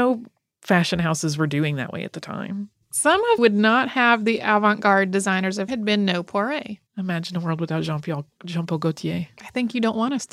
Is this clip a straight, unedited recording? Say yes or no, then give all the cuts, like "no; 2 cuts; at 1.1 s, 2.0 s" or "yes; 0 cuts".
no; 3 cuts; at 3.4 s, 5.7 s, 6.9 s